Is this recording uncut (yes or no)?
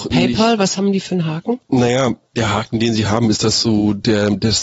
no